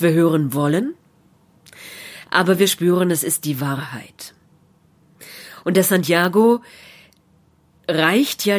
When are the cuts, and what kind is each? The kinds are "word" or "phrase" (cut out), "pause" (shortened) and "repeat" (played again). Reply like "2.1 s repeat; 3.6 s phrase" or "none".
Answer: none